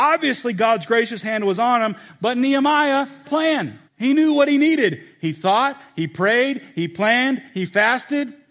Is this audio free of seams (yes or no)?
no